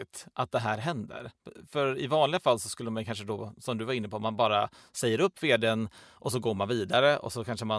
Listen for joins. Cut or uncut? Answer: uncut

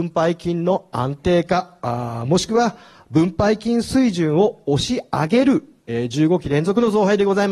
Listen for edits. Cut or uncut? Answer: uncut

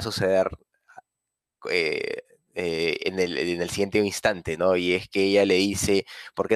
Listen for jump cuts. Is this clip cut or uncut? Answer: uncut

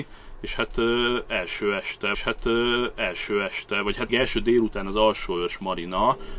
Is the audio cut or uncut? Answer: cut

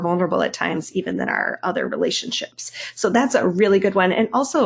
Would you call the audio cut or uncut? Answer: uncut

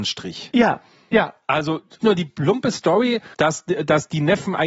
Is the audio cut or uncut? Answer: cut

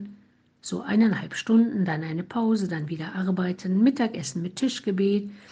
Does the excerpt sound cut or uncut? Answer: uncut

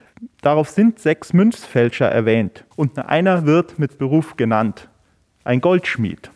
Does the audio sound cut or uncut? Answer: cut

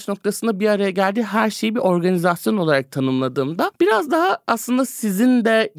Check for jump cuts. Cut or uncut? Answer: uncut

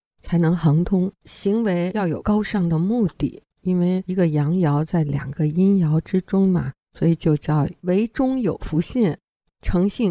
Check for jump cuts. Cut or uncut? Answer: cut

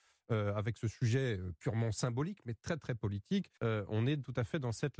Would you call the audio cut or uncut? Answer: cut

